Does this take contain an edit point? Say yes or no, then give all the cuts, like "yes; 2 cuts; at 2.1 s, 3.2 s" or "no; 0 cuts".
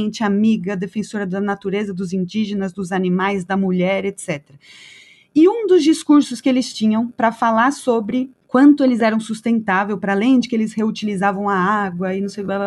no; 0 cuts